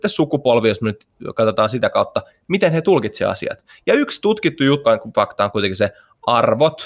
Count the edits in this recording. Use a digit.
2